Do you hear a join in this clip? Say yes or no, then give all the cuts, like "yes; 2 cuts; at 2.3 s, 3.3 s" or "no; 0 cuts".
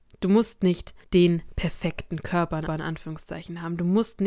yes; 2 cuts; at 1.0 s, 2.7 s